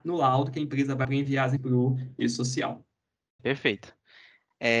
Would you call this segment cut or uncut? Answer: cut